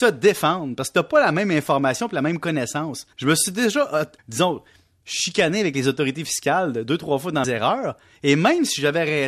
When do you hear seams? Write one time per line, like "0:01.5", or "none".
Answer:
0:03.1
0:04.2
0:07.4